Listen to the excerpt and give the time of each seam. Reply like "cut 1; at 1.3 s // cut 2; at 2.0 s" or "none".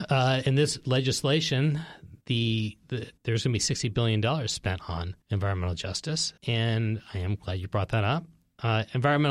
cut 1; at 2.2 s // cut 2; at 3.2 s // cut 3; at 5.2 s // cut 4; at 6.4 s